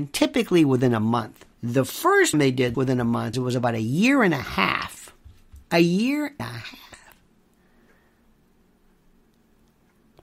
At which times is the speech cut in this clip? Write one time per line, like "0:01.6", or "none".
0:01.5
0:02.3
0:02.7
0:03.3
0:05.6
0:06.4